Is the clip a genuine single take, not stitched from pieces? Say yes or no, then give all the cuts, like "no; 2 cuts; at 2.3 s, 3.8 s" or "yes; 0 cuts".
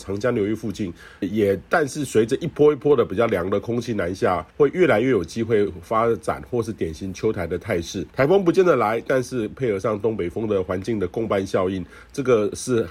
no; 3 cuts; at 1.2 s, 4.5 s, 8.1 s